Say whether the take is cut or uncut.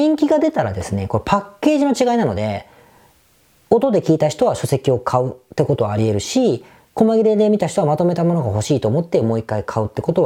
uncut